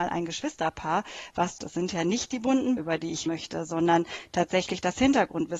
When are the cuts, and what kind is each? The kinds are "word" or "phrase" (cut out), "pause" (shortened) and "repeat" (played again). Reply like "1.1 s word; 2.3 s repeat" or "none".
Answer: 1.6 s word; 2.8 s word; 3.3 s word